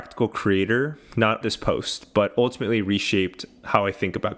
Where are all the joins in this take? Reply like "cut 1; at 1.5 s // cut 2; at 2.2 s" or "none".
cut 1; at 1.4 s